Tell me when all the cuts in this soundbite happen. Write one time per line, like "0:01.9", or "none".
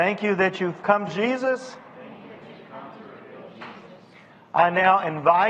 0:01.1